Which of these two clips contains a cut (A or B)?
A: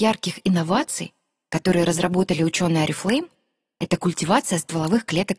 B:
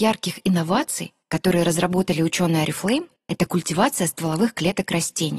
B